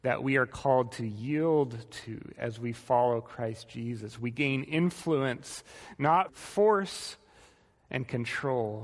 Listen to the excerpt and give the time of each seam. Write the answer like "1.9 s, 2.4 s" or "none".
6.3 s